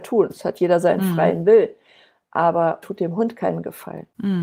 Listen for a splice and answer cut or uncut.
cut